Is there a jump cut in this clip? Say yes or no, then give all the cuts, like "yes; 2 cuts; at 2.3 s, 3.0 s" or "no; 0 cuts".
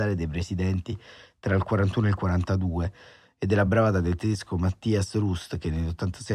no; 0 cuts